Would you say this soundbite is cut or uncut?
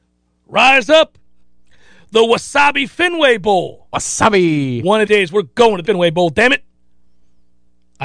cut